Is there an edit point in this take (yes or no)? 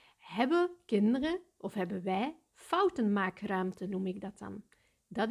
no